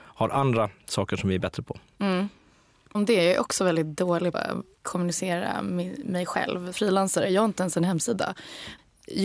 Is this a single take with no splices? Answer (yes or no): no